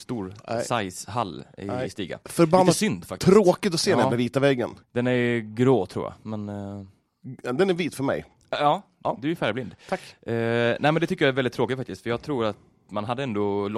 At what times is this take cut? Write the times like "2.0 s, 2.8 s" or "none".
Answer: 4.8 s